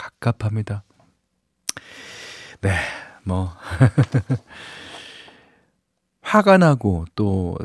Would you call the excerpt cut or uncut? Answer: uncut